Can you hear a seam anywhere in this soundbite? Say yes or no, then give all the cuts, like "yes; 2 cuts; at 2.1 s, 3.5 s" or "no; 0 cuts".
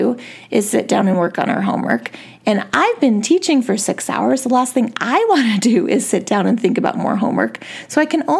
no; 0 cuts